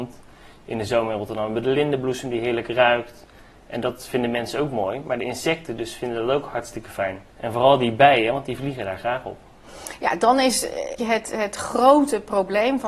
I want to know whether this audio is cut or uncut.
cut